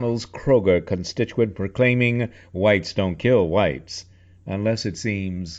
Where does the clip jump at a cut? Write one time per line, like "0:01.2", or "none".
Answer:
none